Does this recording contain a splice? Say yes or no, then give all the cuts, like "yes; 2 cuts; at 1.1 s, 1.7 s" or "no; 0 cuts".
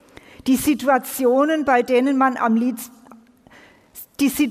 no; 0 cuts